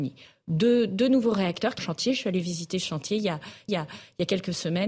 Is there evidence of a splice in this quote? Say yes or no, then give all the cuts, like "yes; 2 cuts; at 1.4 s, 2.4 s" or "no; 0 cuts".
yes; 2 cuts; at 1.8 s, 3.7 s